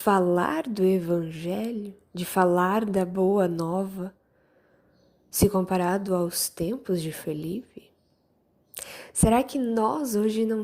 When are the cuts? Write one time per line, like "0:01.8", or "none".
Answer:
none

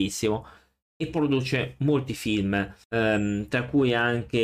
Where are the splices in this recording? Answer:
0:02.8

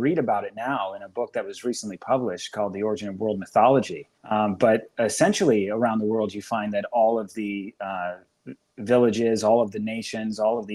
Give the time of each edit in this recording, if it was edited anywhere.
0:04.2

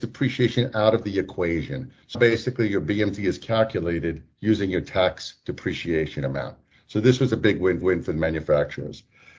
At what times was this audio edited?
0:02.1
0:07.8

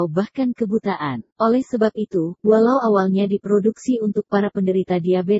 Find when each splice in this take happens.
0:01.3

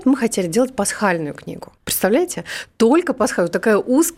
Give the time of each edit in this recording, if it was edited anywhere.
0:01.8

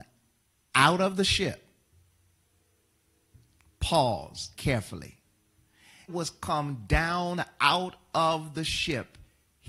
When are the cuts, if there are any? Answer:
0:04.5
0:06.1

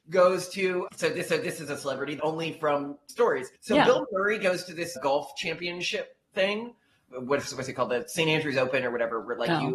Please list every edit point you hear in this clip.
0:01.3
0:02.2
0:03.6

